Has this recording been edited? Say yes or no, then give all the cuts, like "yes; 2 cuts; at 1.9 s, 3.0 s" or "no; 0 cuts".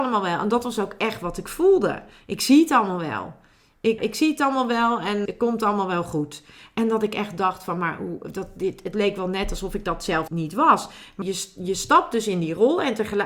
yes; 4 cuts; at 4.0 s, 5.3 s, 10.3 s, 11.2 s